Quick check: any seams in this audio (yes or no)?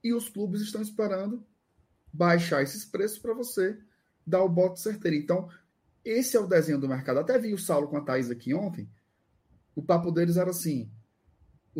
no